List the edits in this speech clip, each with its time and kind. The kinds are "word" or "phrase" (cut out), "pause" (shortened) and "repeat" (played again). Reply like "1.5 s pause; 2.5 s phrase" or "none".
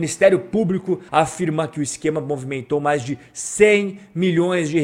1.1 s pause